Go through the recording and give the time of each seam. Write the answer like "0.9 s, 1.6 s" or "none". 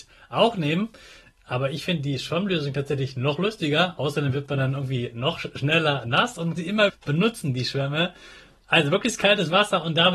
6.6 s, 6.9 s